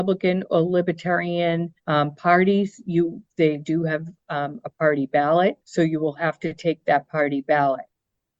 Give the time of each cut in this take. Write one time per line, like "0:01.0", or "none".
0:01.8
0:05.6